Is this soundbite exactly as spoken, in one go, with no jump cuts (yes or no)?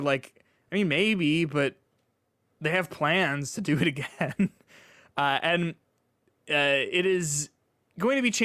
yes